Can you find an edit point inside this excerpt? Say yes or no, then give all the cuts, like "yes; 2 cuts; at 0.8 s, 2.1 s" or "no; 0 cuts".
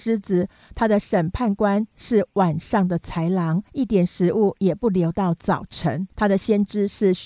yes; 2 cuts; at 3.7 s, 6.1 s